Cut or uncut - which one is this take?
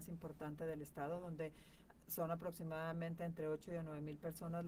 uncut